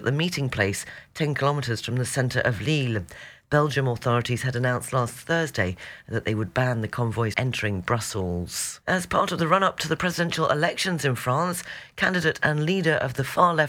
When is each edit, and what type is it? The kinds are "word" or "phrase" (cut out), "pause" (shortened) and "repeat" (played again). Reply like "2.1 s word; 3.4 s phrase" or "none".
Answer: 7.3 s word; 8.8 s pause